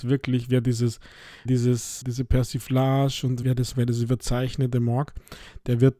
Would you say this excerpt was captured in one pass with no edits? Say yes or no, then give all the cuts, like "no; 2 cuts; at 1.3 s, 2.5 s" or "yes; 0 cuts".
no; 4 cuts; at 1.5 s, 2.0 s, 3.4 s, 3.7 s